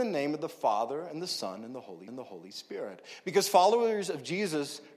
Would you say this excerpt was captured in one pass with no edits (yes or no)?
no